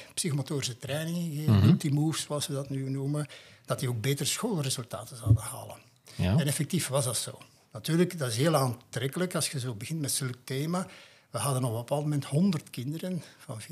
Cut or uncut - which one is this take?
uncut